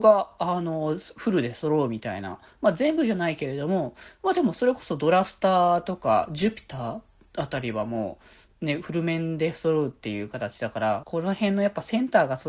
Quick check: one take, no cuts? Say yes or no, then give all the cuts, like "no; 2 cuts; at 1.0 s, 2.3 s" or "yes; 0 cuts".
no; 1 cut; at 11.0 s